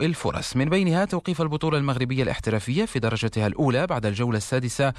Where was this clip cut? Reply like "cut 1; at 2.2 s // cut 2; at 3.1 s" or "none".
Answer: none